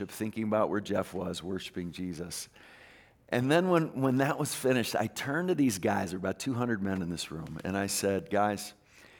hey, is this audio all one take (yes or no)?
yes